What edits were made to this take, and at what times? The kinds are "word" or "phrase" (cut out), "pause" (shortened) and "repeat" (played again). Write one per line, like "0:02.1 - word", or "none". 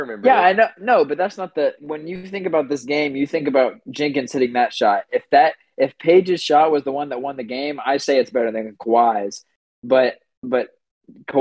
0:01.8 - word

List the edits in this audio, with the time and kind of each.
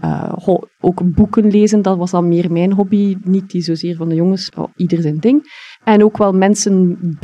0:04.5 - word
0:05.7 - pause

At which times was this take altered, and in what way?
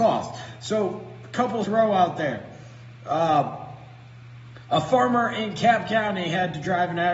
0:01.6 - phrase

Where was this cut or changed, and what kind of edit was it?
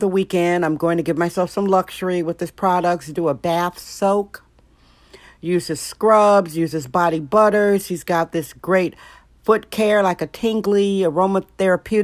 none

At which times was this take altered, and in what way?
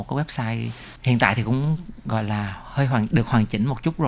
none

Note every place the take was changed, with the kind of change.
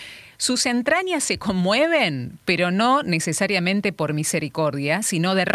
none

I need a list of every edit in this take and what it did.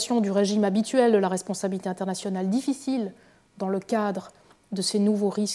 none

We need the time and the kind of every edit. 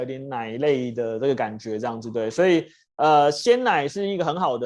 none

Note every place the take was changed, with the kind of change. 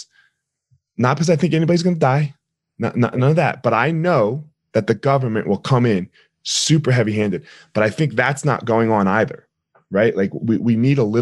none

